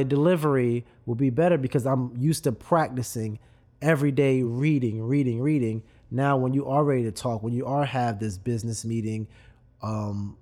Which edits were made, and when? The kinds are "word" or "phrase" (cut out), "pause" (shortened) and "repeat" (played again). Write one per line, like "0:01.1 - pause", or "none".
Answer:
none